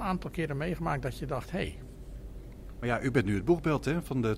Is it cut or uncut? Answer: uncut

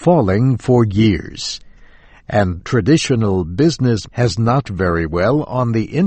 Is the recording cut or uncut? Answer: cut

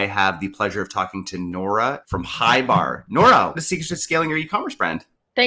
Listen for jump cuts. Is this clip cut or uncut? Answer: cut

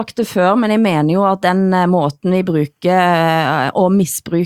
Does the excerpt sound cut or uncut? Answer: uncut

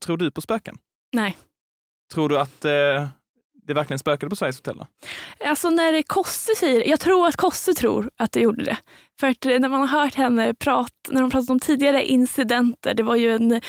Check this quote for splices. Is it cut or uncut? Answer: uncut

